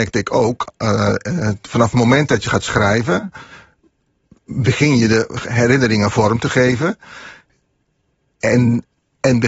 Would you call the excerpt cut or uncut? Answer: uncut